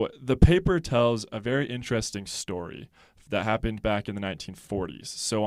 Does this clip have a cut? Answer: no; 0 cuts

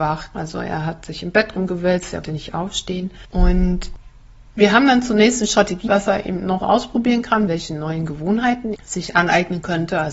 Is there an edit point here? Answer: yes; 5 cuts; at 2.2 s, 5.9 s, 6.6 s, 7.5 s, 8.7 s

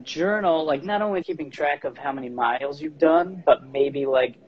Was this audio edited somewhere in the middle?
yes; 1 cut; at 1.2 s

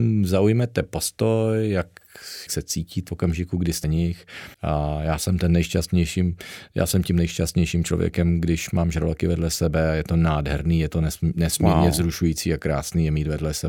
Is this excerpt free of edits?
no; 4 cuts; at 2.5 s, 3.1 s, 3.8 s, 4.5 s

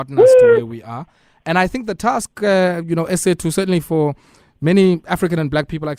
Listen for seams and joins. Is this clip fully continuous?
yes; 0 cuts

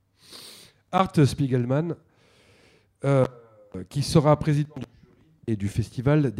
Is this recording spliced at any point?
no; 0 cuts

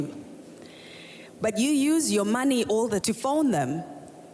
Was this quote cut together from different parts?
yes; 1 cut; at 3.0 s

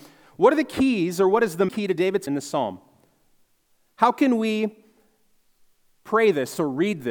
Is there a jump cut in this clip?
yes; 2 cuts; at 1.7 s, 2.3 s

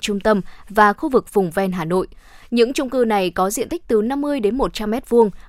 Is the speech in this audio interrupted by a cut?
no; 0 cuts

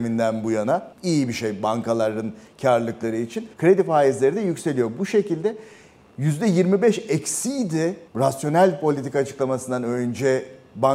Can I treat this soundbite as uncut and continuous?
no; 3 cuts; at 0.9 s, 3.5 s, 8.1 s

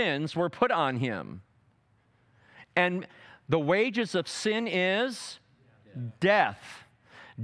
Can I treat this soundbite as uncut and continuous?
yes; 0 cuts

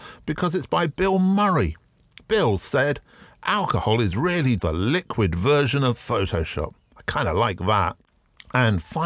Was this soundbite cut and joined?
yes; 1 cut; at 4.6 s

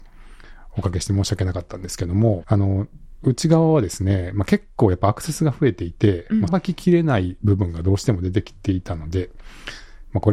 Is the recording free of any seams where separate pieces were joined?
no; 2 cuts; at 2.4 s, 6.5 s

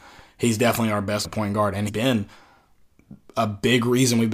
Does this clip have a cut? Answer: yes; 2 cuts; at 1.2 s, 1.9 s

